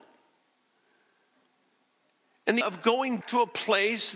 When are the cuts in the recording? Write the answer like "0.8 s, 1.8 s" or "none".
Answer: 2.6 s, 3.2 s